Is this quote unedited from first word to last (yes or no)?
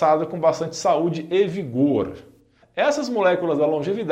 yes